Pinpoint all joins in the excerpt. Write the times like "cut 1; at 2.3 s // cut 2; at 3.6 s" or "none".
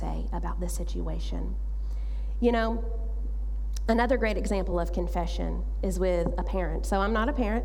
none